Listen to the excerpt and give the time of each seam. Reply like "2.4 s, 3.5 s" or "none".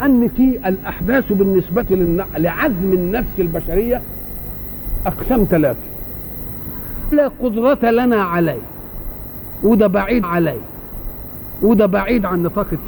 7.1 s, 10.2 s

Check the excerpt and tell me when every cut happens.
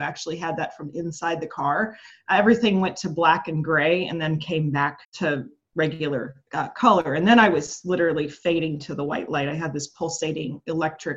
2.1 s, 5.0 s, 6.5 s

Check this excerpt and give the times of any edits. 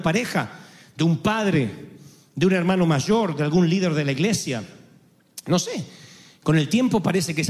none

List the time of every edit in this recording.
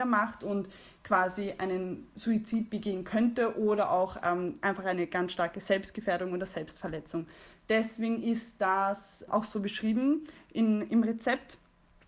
9.3 s

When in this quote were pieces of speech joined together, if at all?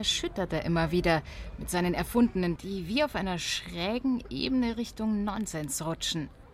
2.6 s

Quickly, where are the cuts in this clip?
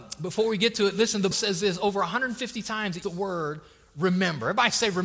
1.3 s, 3.0 s

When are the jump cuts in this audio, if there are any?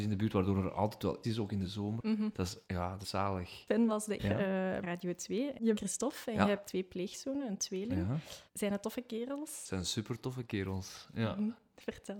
1.2 s, 2.6 s, 3.0 s, 3.9 s, 4.2 s, 4.8 s, 5.7 s, 6.6 s, 8.5 s

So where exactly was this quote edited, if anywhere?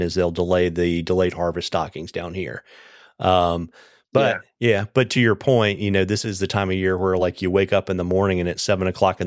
none

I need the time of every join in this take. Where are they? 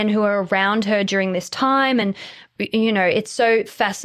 none

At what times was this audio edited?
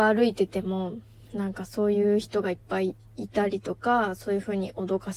none

